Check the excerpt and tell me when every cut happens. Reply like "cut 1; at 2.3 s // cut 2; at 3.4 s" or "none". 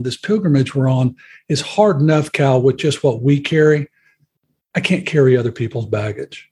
none